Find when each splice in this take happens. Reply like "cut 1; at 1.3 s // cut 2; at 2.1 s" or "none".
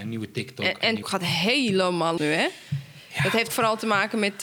cut 1; at 1.0 s // cut 2; at 2.2 s // cut 3; at 3.5 s